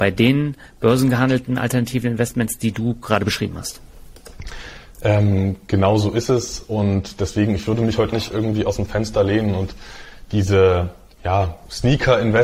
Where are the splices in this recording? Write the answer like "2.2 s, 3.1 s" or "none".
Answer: 8.1 s

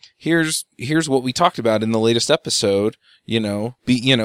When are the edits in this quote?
none

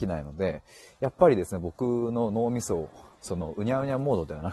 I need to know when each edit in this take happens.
3.2 s

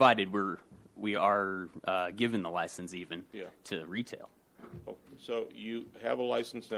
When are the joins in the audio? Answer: none

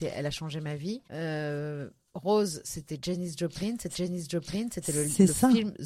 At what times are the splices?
1.0 s, 3.9 s

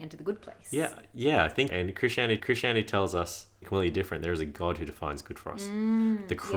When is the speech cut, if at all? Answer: 1.7 s, 2.4 s, 3.6 s

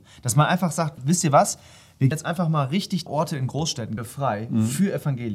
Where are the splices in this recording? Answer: 1.0 s, 2.1 s, 3.1 s, 4.0 s

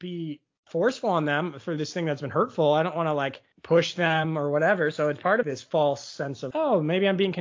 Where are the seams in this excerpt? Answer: 3.5 s, 5.4 s, 6.5 s

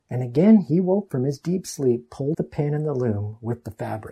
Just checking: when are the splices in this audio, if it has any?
1.1 s, 2.3 s

